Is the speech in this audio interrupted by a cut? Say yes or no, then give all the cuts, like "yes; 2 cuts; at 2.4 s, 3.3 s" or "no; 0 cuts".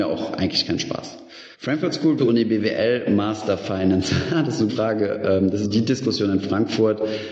yes; 4 cuts; at 1.5 s, 2.2 s, 4.7 s, 5.6 s